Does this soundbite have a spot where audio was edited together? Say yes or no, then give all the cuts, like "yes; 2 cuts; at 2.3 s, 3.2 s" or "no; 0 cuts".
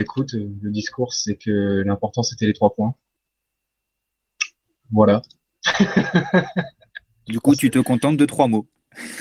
no; 0 cuts